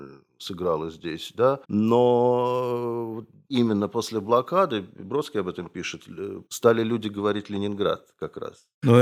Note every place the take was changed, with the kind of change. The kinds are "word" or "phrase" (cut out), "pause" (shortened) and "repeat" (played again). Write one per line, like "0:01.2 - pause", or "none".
0:01.6 - pause
0:06.5 - pause